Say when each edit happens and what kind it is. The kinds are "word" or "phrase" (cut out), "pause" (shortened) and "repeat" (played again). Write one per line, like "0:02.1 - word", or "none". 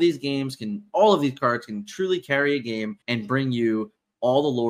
0:03.0 - pause